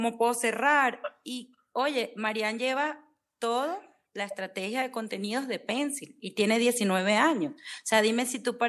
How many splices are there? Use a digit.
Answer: 0